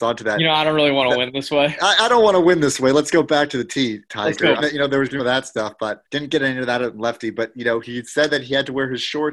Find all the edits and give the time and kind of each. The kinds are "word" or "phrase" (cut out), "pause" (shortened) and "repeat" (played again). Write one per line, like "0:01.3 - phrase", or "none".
0:04.6 - phrase
0:05.2 - phrase
0:06.0 - pause